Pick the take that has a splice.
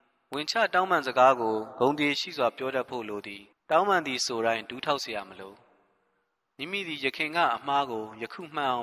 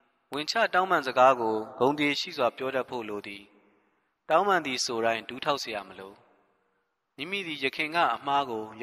first; 1 cut; at 3.5 s

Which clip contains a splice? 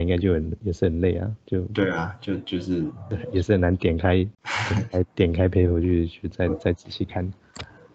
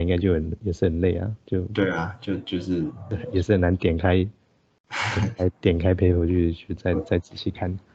first; 1 cut; at 4.3 s

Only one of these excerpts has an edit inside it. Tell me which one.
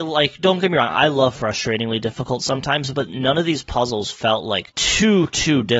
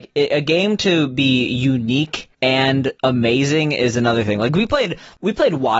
second; 1 cut; at 3.0 s

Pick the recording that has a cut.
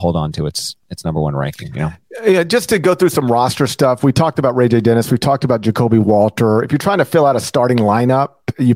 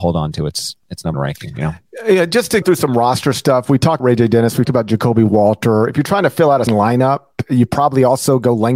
second; 5 cuts; at 1.1 s, 2.6 s, 4.0 s, 4.6 s, 6.7 s

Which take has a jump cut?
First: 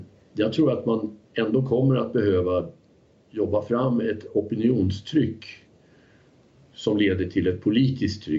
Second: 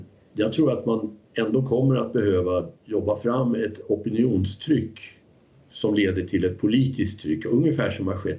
second; 2 cuts; at 2.8 s, 5.3 s

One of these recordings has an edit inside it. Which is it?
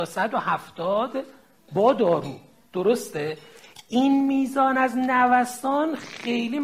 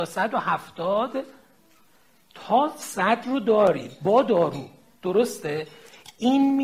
first; 1 cut; at 1.7 s

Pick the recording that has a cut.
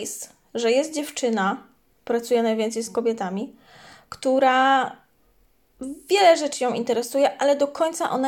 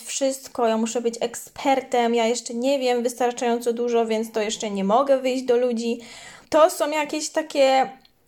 second; 1 cut; at 6.4 s

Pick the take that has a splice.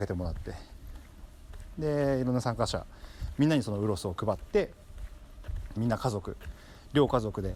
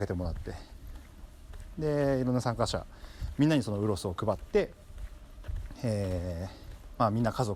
first; 1 cut; at 5.8 s

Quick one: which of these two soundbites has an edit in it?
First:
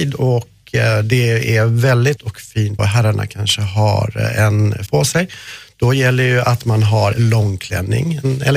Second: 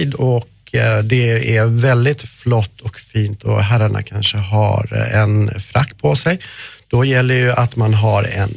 first; 4 cuts; at 2.2 s, 2.8 s, 4.9 s, 7.1 s

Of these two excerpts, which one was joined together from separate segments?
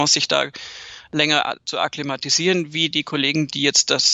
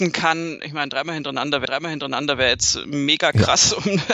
second; 1 cut; at 1.6 s

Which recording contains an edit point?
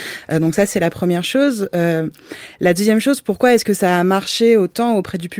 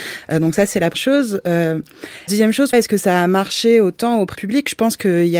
second; 4 cuts; at 0.9 s, 2.3 s, 2.7 s, 4.3 s

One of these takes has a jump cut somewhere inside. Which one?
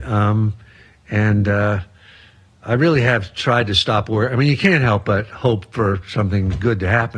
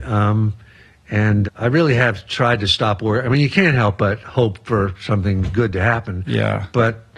second; 1 cut; at 1.4 s

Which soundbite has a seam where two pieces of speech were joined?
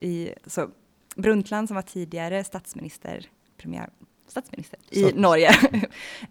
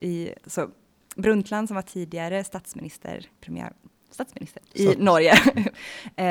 second; 1 cut; at 3.3 s

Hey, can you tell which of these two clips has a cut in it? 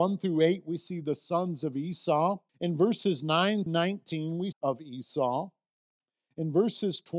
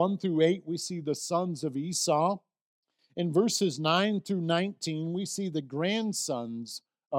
first; 3 cuts; at 2.5 s, 3.7 s, 4.5 s

